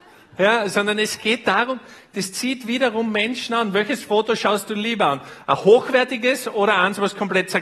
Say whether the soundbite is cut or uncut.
uncut